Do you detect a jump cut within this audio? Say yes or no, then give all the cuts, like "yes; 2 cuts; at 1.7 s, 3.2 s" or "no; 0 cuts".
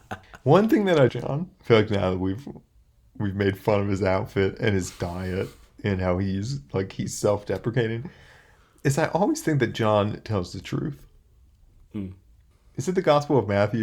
yes; 1 cut; at 1.1 s